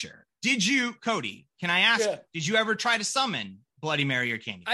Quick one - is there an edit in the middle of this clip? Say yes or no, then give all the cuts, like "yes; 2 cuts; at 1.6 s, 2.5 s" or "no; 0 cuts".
no; 0 cuts